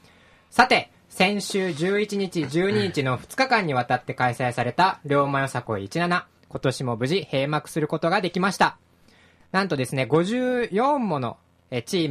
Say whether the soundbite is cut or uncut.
uncut